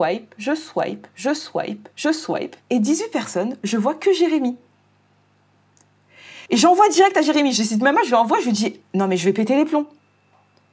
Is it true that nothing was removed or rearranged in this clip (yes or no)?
no